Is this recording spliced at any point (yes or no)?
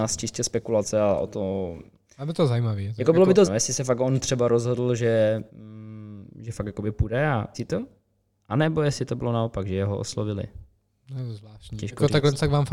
yes